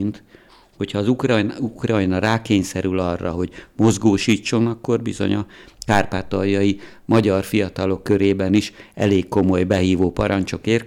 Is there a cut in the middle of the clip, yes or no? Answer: no